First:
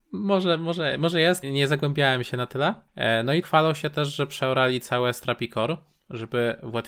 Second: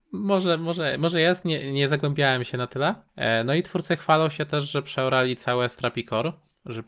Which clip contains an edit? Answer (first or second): first